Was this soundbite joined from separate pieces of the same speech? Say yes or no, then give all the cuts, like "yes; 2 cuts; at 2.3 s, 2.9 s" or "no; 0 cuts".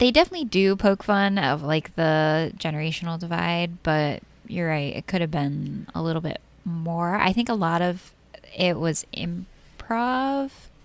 no; 0 cuts